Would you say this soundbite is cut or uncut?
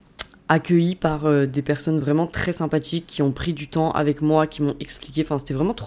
uncut